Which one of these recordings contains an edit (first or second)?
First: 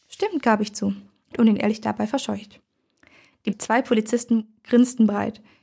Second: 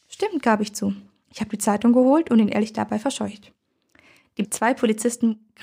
first